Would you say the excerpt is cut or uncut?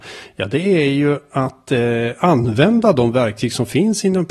uncut